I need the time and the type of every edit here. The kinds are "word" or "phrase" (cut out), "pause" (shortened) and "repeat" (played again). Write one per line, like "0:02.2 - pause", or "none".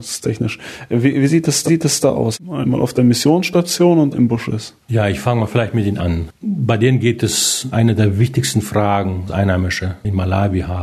0:01.7 - repeat
0:04.1 - phrase
0:04.8 - pause
0:06.0 - word
0:06.4 - pause
0:07.7 - word
0:09.3 - word